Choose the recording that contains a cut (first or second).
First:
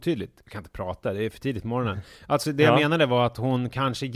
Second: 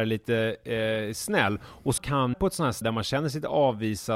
second